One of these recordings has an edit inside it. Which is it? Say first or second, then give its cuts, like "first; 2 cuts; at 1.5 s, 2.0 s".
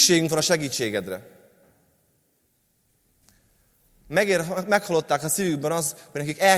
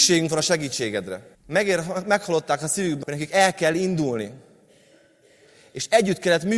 second; 2 cuts; at 1.3 s, 3.0 s